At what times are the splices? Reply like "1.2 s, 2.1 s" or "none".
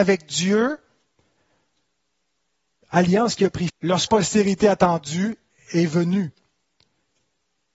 3.7 s, 4.1 s